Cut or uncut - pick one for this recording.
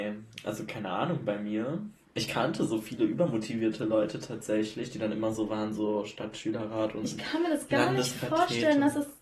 uncut